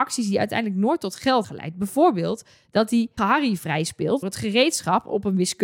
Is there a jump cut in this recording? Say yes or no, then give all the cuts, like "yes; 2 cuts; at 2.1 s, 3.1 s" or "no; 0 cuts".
yes; 3 cuts; at 1.4 s, 3.2 s, 4.2 s